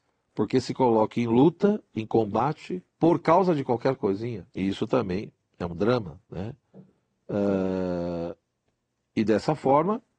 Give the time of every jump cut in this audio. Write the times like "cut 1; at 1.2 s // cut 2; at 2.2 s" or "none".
cut 1; at 2.9 s // cut 2; at 4.5 s // cut 3; at 6.3 s